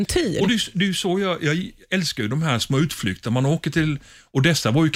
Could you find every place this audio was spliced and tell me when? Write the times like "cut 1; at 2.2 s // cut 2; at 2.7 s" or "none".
none